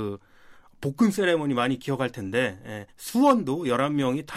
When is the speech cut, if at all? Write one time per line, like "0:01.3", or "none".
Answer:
0:02.9